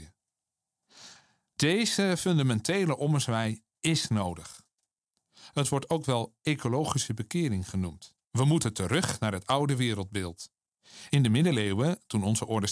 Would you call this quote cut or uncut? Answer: cut